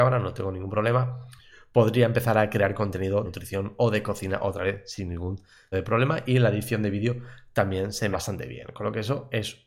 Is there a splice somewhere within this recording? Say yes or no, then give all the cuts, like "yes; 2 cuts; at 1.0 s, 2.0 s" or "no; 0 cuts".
yes; 3 cuts; at 3.2 s, 5.7 s, 8.1 s